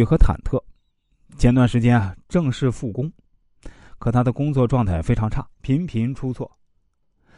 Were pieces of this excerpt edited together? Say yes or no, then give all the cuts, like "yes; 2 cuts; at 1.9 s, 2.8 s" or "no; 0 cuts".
yes; 1 cut; at 5.5 s